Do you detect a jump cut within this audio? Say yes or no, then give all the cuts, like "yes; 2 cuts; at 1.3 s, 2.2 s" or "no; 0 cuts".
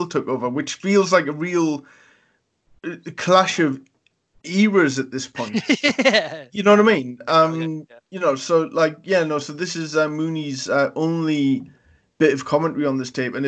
no; 0 cuts